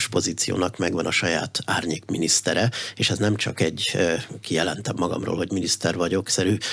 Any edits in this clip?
no; 0 cuts

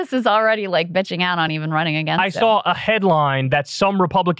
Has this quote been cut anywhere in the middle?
no; 0 cuts

